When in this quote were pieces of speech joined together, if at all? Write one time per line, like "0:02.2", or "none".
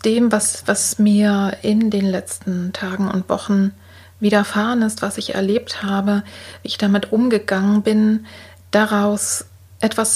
none